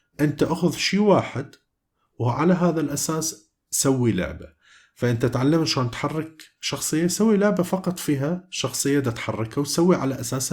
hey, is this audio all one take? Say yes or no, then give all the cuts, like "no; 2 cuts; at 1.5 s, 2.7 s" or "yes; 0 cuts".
yes; 0 cuts